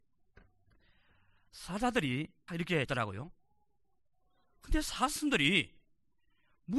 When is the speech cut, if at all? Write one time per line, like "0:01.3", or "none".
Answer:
0:02.5
0:02.8